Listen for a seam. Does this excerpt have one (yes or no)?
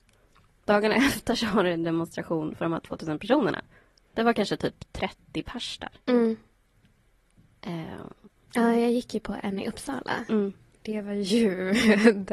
no